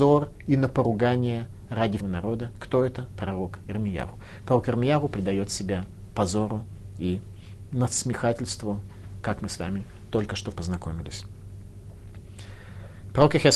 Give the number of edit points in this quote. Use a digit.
2